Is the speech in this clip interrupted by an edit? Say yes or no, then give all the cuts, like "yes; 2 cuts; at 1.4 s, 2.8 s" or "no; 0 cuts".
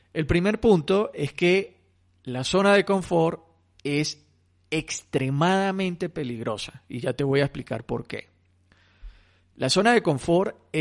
no; 0 cuts